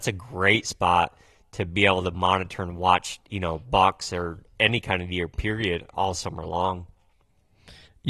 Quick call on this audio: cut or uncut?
uncut